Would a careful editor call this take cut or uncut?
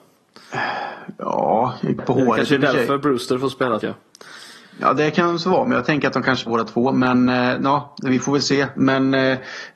cut